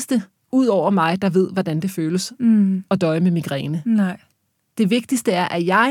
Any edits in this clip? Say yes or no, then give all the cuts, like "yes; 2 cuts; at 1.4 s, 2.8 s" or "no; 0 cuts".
no; 0 cuts